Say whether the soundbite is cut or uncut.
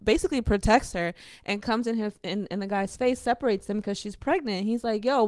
uncut